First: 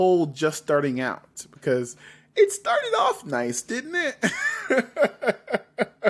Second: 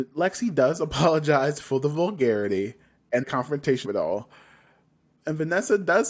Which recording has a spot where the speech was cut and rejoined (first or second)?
second